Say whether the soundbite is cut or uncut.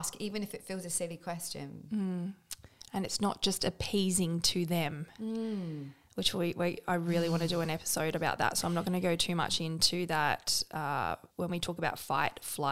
cut